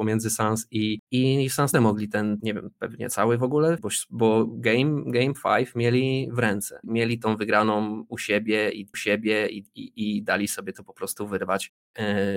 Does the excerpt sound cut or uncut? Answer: cut